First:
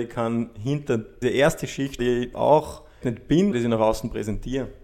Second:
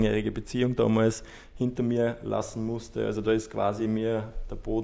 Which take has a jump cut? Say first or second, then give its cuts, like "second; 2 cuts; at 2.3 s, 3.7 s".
first; 5 cuts; at 1.2 s, 2.0 s, 2.3 s, 3.0 s, 3.5 s